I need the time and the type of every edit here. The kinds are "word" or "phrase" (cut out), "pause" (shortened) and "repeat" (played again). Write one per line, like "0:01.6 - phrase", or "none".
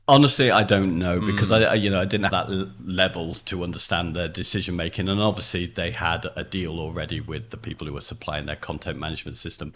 0:02.3 - word